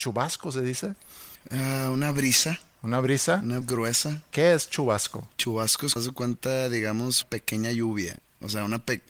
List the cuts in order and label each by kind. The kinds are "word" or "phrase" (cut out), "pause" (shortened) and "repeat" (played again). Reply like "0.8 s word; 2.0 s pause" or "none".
1.4 s pause; 3.6 s word; 5.3 s pause; 6.0 s word; 7.2 s word